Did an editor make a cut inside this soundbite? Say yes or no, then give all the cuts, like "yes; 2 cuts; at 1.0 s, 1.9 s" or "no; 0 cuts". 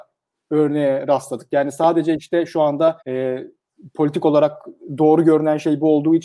yes; 1 cut; at 3.0 s